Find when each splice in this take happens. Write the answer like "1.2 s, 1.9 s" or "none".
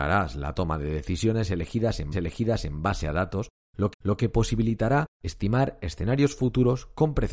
2.1 s, 3.9 s, 5.1 s